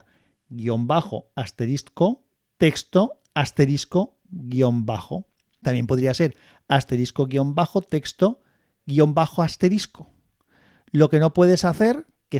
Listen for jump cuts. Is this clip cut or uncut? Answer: uncut